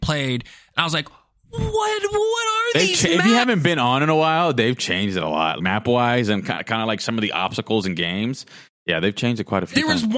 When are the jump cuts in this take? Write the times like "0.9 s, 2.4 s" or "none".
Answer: 5.6 s